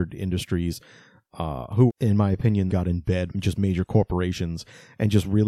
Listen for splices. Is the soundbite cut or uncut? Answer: cut